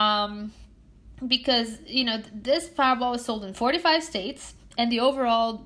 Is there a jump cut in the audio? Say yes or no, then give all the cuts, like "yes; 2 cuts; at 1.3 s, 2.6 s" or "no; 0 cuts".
no; 0 cuts